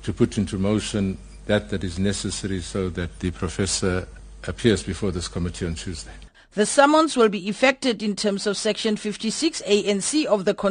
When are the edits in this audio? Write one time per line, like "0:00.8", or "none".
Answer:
none